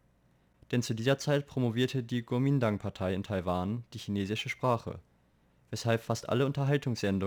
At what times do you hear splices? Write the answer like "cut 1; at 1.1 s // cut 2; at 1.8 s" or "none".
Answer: none